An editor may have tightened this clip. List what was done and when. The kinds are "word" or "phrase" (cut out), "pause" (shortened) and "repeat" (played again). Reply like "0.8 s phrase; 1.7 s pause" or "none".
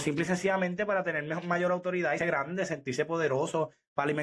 2.2 s word